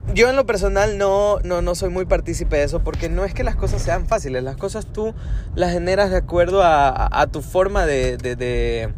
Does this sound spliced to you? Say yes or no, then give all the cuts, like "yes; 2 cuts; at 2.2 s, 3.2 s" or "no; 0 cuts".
yes; 1 cut; at 1.4 s